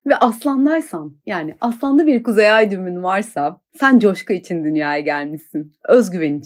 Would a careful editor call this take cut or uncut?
uncut